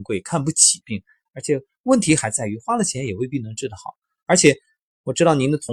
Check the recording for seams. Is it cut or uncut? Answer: uncut